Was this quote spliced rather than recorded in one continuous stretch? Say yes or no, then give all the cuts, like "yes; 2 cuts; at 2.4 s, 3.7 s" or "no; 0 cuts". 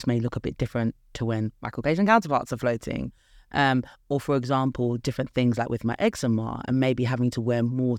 no; 0 cuts